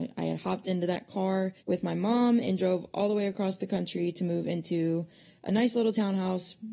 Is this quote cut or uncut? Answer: cut